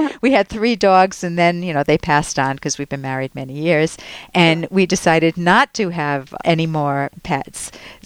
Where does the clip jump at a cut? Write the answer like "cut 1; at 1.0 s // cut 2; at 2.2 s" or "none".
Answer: cut 1; at 6.4 s